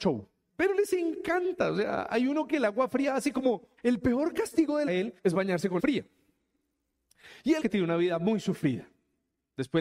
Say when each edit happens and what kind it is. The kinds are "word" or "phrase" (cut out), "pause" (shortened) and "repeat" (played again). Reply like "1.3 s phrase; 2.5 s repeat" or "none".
3.8 s pause; 4.9 s phrase; 5.2 s pause; 5.8 s word; 7.6 s phrase